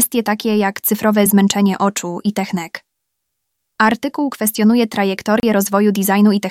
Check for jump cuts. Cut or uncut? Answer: uncut